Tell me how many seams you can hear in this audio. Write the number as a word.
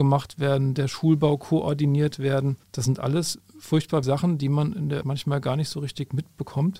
three